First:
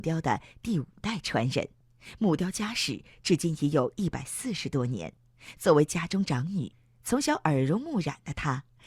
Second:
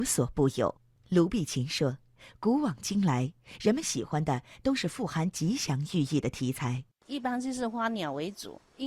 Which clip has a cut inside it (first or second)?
second